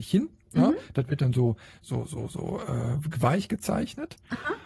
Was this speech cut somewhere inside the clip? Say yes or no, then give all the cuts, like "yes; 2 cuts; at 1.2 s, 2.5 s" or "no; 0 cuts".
no; 0 cuts